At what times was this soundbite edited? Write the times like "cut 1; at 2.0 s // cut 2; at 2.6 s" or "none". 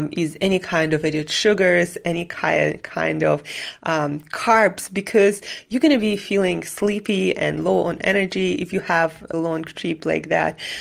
cut 1; at 9.3 s